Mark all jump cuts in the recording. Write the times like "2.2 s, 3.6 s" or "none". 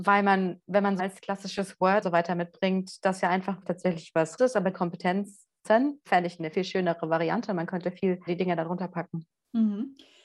1.0 s, 2.0 s, 3.6 s, 4.4 s, 4.7 s, 6.5 s, 8.3 s